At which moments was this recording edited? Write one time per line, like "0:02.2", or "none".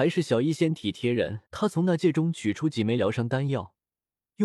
0:01.5